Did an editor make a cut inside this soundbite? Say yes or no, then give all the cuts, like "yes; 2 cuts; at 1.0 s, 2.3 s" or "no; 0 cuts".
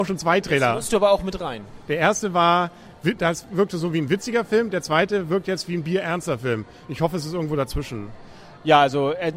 no; 0 cuts